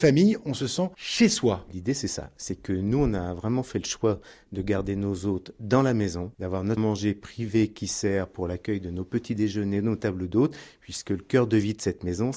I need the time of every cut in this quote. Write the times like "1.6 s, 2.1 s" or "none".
6.8 s

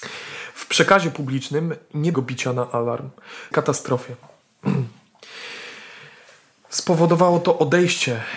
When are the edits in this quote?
2.1 s, 3.5 s

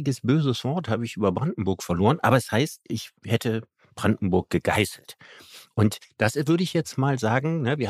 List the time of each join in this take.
none

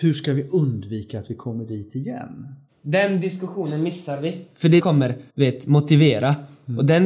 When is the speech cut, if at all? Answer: 4.8 s, 5.3 s

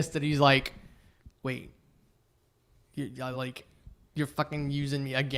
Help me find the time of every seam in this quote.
none

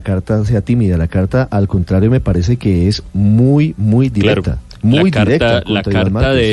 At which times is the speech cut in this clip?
none

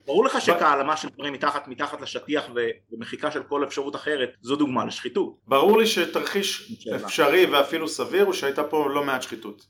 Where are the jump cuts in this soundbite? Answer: 4.3 s, 5.4 s

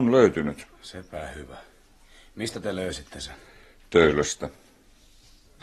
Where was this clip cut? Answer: none

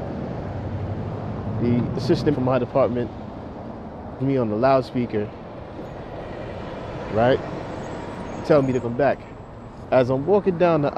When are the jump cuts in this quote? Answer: 2.3 s, 4.2 s, 8.8 s

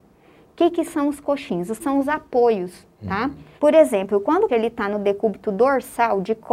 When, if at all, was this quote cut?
1.8 s, 3.6 s, 4.5 s

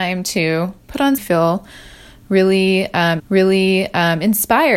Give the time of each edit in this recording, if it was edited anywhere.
1.2 s, 3.2 s

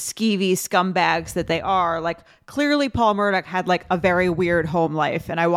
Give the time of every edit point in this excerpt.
none

